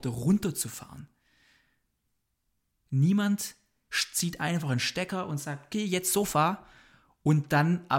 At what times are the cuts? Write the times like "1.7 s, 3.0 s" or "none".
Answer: none